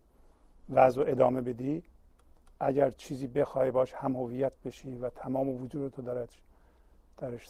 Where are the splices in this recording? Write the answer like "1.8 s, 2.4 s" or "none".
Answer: none